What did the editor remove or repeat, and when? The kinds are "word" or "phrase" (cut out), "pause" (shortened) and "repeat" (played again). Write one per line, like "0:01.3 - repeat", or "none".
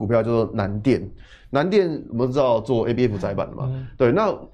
none